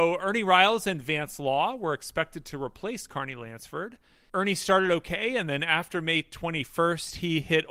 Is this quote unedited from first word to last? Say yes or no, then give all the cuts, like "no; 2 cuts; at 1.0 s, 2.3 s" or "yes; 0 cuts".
yes; 0 cuts